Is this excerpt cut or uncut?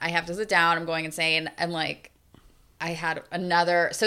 uncut